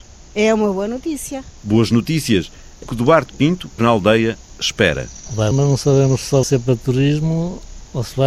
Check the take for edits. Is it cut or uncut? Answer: cut